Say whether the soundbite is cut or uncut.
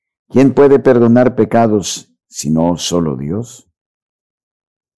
uncut